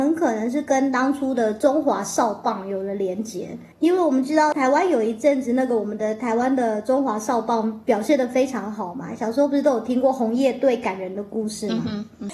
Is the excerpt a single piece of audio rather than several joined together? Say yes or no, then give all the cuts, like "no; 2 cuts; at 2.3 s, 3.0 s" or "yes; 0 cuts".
no; 1 cut; at 3.7 s